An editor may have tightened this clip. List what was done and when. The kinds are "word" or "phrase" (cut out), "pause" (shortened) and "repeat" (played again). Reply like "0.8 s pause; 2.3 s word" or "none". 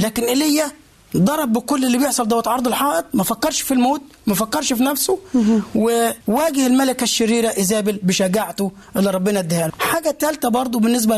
6.2 s pause; 9.7 s word